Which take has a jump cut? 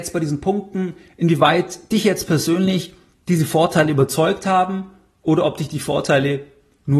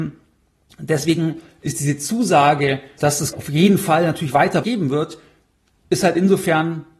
second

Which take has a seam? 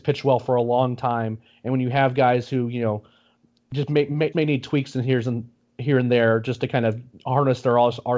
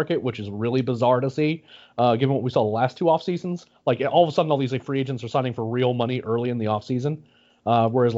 first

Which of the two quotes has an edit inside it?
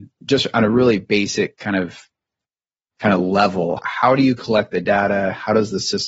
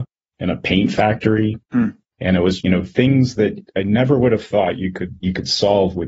second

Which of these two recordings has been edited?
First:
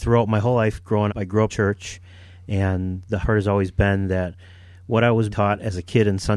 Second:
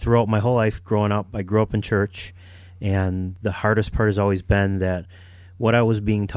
first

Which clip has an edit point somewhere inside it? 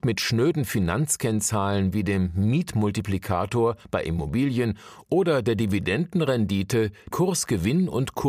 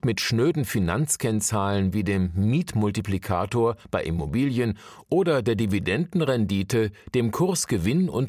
first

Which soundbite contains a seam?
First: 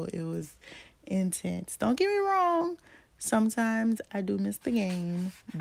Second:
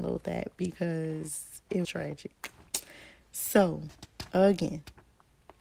second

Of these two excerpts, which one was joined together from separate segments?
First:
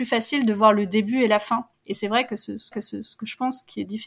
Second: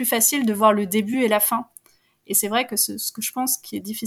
first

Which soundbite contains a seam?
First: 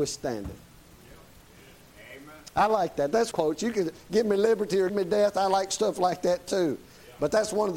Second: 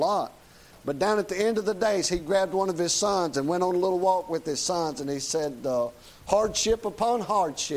first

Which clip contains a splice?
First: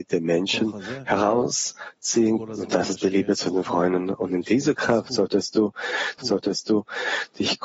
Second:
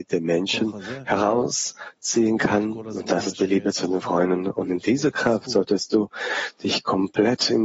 first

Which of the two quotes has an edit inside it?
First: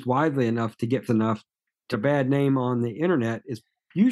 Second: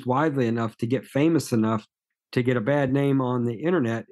first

